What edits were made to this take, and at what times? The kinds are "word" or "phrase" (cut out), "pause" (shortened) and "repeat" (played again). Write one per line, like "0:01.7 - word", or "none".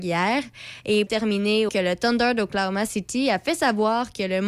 0:01.1 - word
0:01.7 - phrase